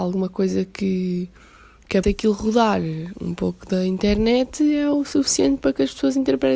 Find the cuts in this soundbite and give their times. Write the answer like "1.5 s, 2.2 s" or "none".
2.0 s